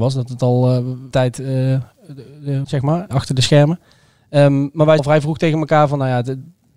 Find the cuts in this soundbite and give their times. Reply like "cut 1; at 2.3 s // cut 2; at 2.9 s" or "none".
cut 1; at 1.1 s // cut 2; at 2.6 s // cut 3; at 3.1 s // cut 4; at 5.0 s